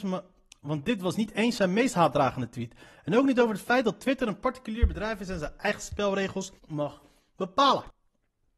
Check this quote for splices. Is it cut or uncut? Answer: cut